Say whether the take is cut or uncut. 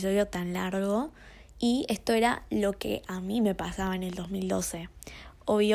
cut